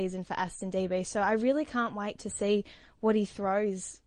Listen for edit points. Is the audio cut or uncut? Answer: uncut